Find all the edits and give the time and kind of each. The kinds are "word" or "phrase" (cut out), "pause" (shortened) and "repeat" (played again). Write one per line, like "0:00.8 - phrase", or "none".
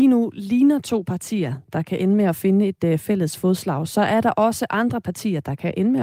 none